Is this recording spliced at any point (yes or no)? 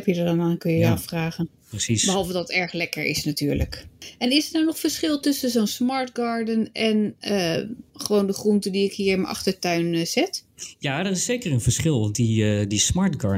yes